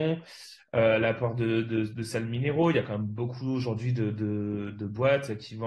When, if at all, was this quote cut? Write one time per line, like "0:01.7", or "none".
none